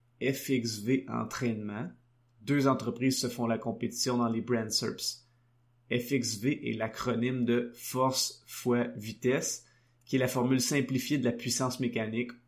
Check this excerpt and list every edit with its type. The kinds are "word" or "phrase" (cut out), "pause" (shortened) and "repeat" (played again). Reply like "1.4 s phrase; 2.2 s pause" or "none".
none